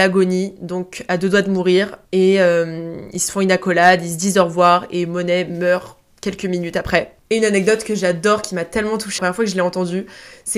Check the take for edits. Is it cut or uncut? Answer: cut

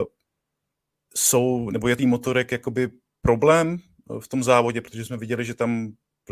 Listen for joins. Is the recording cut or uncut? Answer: cut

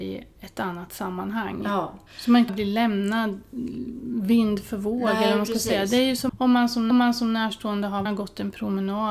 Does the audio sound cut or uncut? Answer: cut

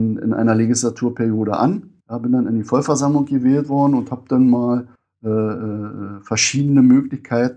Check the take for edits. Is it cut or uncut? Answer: cut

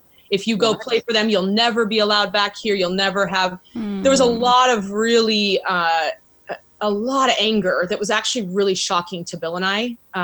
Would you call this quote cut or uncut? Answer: uncut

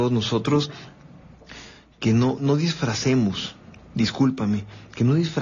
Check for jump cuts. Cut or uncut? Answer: uncut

